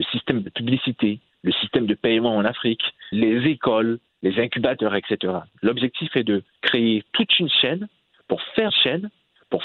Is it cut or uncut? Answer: cut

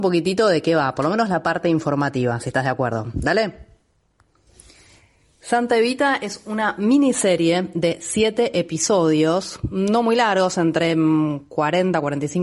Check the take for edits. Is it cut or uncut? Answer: uncut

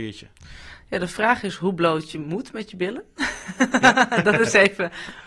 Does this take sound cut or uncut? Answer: uncut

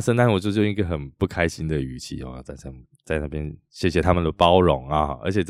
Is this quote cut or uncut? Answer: uncut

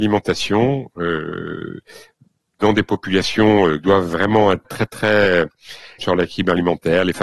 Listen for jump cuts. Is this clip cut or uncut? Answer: cut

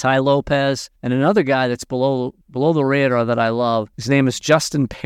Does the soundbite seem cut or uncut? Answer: cut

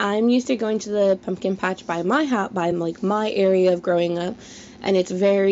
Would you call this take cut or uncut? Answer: uncut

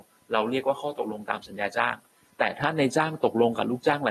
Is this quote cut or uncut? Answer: uncut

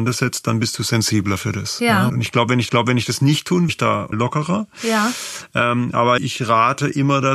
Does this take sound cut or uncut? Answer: cut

